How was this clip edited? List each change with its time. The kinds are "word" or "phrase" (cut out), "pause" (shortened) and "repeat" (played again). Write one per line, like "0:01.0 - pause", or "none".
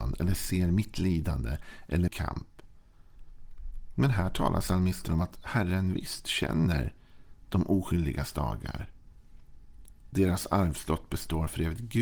0:02.1 - word